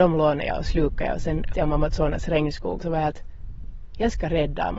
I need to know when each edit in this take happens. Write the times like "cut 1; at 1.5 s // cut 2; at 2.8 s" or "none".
cut 1; at 1.5 s // cut 2; at 2.8 s